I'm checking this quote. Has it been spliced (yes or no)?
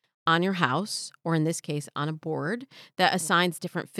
no